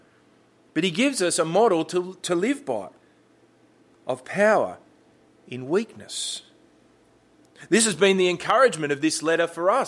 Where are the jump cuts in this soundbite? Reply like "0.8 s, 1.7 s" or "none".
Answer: none